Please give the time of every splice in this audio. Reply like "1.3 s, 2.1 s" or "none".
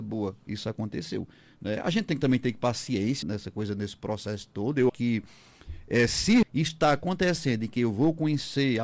3.2 s, 4.9 s, 6.4 s